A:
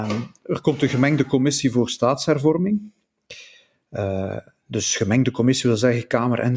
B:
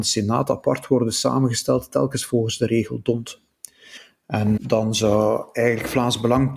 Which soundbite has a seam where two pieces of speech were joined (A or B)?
B